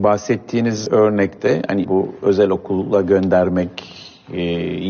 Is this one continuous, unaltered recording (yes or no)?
no